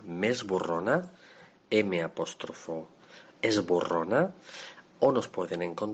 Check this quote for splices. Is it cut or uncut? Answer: cut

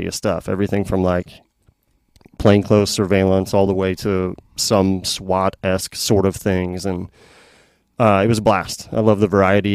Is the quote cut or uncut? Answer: uncut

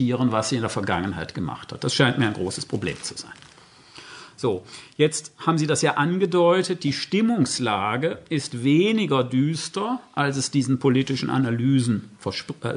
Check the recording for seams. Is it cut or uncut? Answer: uncut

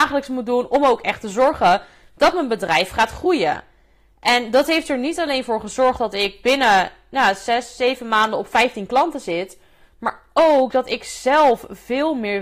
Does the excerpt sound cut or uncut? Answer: uncut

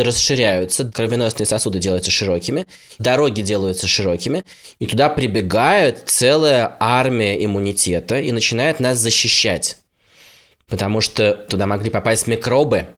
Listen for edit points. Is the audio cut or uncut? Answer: uncut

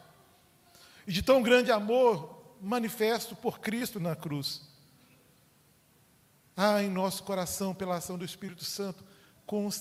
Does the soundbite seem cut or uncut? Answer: uncut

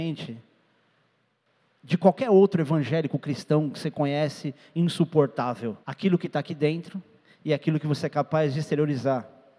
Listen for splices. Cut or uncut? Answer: cut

